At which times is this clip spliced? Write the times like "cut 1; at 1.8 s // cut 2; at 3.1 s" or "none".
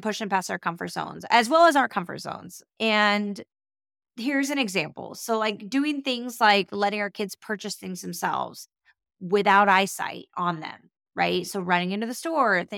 none